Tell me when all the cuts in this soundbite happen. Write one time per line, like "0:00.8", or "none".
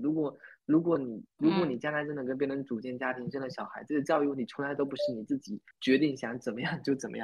0:05.7